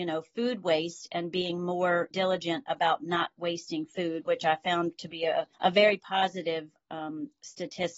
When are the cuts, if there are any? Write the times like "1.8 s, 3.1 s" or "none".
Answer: 2.1 s, 5.5 s